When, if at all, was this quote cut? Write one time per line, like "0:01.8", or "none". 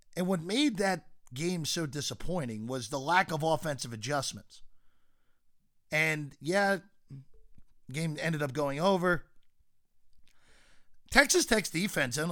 none